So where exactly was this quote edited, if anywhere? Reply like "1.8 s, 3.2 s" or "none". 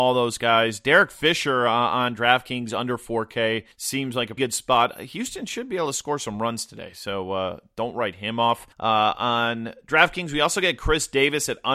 3.7 s, 4.4 s, 8.7 s